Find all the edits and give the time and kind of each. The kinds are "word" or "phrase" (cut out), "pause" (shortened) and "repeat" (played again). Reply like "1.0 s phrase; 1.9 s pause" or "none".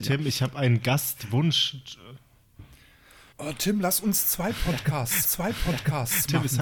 3.3 s pause; 5.2 s repeat